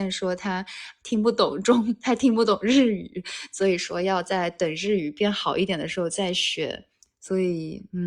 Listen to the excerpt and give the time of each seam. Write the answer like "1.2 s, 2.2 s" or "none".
7.0 s